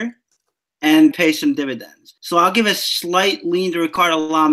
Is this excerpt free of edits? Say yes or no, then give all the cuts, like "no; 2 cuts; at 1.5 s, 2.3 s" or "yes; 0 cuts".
no; 2 cuts; at 1.1 s, 2.2 s